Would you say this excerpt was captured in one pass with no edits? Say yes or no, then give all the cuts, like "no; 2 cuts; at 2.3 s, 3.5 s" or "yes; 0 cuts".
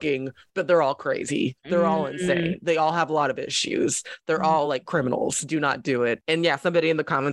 yes; 0 cuts